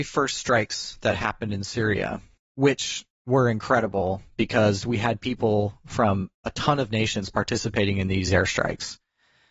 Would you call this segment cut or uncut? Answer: cut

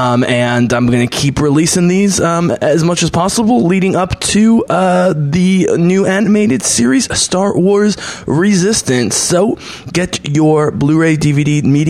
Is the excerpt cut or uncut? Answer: uncut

